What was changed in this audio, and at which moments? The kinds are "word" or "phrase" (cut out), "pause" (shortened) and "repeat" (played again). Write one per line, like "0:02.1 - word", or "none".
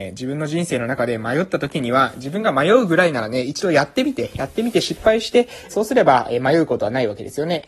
0:05.7 - phrase